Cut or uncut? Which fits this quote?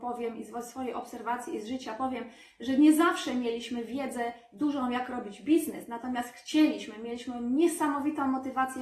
uncut